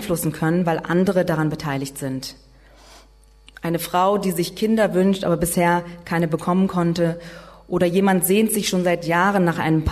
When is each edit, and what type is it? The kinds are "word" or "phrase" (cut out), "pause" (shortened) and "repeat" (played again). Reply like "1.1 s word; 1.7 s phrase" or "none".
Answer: none